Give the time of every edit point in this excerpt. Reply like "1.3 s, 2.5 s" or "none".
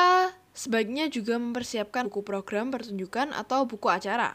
2.0 s